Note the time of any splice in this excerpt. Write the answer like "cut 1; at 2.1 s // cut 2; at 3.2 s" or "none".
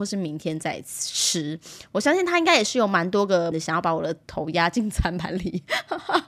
cut 1; at 3.5 s